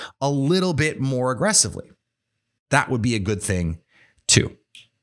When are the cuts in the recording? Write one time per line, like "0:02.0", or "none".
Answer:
none